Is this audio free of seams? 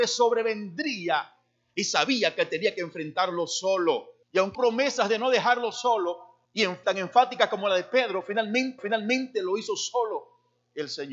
no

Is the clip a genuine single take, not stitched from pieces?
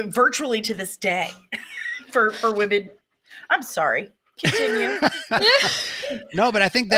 yes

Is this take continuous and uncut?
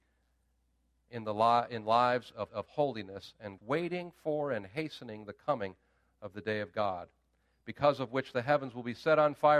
no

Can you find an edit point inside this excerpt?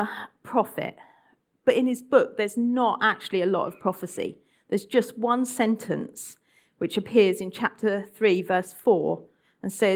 no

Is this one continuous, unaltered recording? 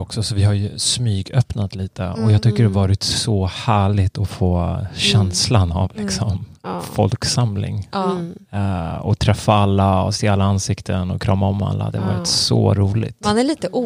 yes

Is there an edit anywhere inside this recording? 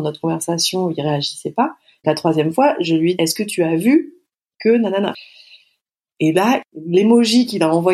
yes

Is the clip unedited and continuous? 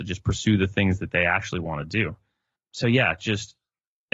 no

